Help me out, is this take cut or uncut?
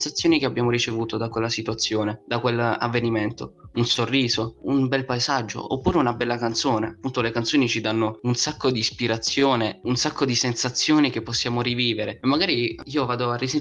uncut